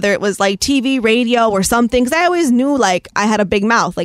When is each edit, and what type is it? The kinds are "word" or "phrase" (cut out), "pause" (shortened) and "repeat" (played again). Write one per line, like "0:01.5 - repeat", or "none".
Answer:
none

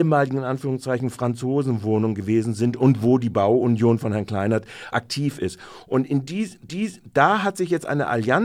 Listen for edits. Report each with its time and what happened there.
0:04.9 - word
0:06.7 - repeat

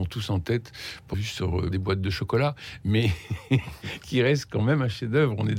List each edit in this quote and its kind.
0:01.1 - word
0:01.7 - word

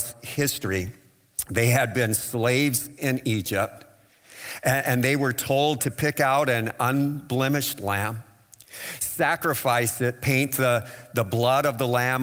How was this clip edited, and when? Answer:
0:05.8 - word

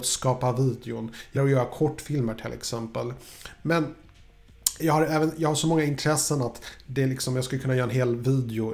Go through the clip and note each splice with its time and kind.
0:01.4 - word
0:04.8 - word

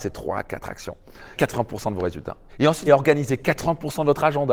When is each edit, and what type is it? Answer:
0:01.4 - phrase
0:02.5 - pause
0:02.9 - word

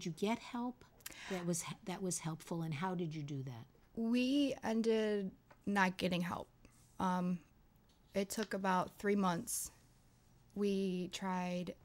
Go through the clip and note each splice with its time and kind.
none

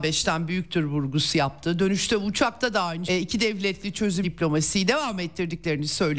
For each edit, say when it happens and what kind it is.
0:03.1 - word
0:04.2 - phrase

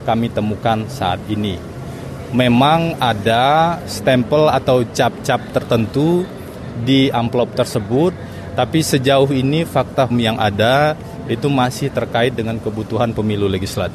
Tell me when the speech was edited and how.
0:03.8 - word
0:10.1 - word

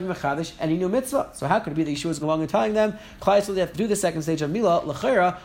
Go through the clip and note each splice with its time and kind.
0:02.2 - word
0:03.7 - word

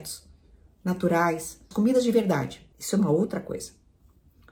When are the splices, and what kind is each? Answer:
0:01.7 - word
0:02.7 - pause

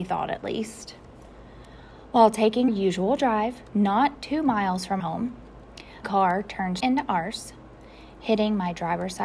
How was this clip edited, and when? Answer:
0:02.7 - word
0:04.1 - word
0:05.0 - word
0:06.0 - word
0:06.8 - word

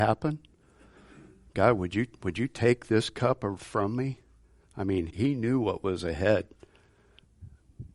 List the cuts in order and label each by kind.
0:03.6 - word
0:05.1 - word

